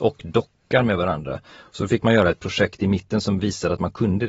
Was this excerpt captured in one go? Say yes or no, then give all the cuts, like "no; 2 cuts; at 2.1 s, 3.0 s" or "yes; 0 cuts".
yes; 0 cuts